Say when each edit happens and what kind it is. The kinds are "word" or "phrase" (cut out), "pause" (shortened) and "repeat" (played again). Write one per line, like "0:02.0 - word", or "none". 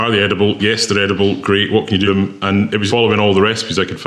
0:02.1 - word
0:02.9 - word